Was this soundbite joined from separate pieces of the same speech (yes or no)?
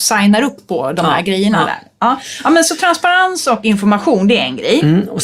no